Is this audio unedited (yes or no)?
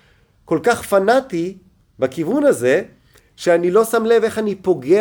yes